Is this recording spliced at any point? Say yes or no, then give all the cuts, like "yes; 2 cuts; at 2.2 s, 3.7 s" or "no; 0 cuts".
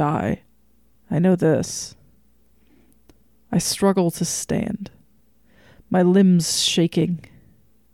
no; 0 cuts